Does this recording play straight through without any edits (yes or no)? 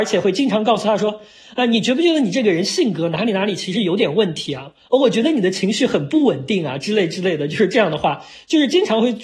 yes